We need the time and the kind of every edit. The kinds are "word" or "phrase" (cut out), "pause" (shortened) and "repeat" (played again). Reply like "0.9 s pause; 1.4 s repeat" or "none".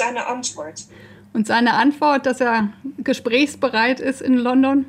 none